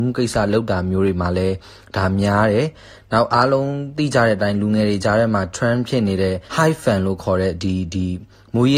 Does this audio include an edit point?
yes; 1 cut; at 6.5 s

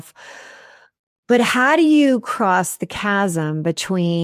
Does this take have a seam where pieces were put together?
no; 0 cuts

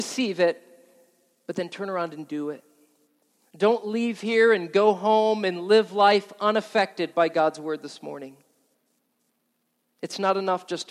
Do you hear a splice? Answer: no; 0 cuts

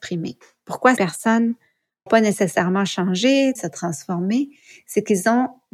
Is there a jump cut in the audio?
yes; 3 cuts; at 1.0 s, 2.1 s, 3.6 s

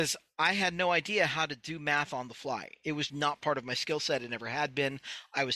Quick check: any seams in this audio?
yes; 1 cut; at 3.1 s

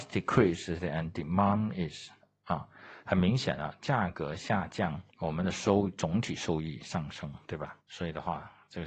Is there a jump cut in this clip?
yes; 4 cuts; at 2.2 s, 5.1 s, 7.4 s, 7.8 s

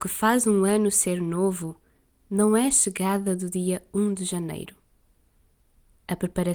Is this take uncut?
yes; 0 cuts

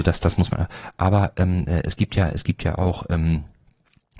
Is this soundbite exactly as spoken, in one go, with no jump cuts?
yes; 0 cuts

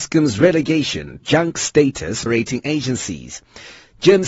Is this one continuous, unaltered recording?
no; 2 cuts; at 1.2 s, 2.3 s

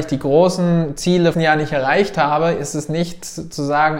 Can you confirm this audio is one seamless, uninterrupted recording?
no; 1 cut; at 1.3 s

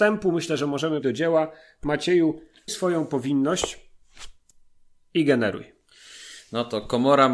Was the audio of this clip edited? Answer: yes; 2 cuts; at 1.0 s, 2.7 s

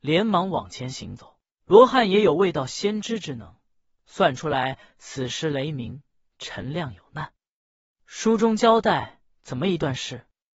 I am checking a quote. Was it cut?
yes; 2 cuts; at 1.6 s, 9.3 s

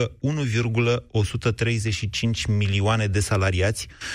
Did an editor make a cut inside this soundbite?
no; 0 cuts

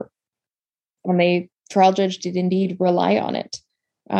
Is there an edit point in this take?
yes; 2 cuts; at 1.0 s, 1.5 s

